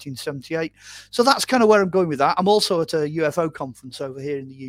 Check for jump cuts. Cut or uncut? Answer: uncut